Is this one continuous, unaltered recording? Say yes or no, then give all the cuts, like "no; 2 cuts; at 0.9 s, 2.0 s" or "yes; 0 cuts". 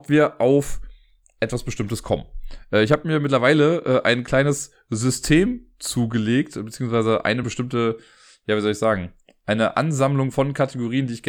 yes; 0 cuts